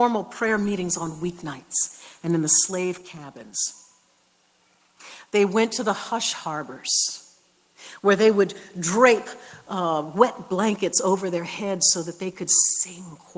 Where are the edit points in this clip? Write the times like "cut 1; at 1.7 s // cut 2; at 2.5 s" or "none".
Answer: none